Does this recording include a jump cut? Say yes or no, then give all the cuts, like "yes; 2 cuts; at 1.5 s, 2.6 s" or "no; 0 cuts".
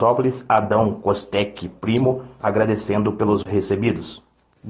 yes; 1 cut; at 3.4 s